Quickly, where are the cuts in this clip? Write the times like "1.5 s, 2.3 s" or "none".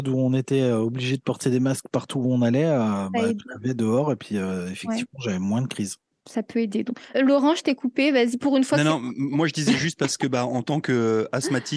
6.0 s, 7.1 s